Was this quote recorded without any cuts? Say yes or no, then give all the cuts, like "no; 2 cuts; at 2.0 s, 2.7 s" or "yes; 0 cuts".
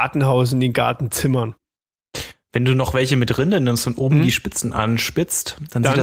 yes; 0 cuts